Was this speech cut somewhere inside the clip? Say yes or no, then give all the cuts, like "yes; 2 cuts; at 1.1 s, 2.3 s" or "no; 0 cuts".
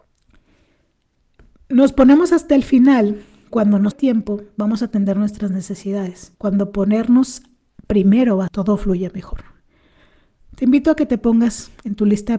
yes; 4 cuts; at 3.5 s, 3.9 s, 6.3 s, 8.5 s